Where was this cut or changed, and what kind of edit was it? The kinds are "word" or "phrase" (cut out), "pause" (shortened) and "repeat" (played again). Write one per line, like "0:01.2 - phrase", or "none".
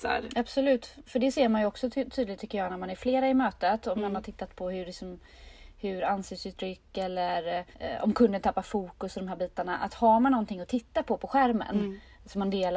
0:07.7 - pause